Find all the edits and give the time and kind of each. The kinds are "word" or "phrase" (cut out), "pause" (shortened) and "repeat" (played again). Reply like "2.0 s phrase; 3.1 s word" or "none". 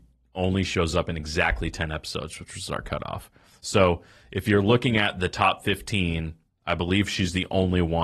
none